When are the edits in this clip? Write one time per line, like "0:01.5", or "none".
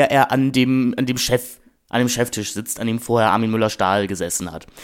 none